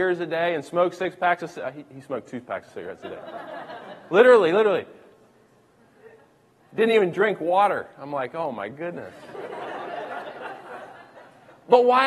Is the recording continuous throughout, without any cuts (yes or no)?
yes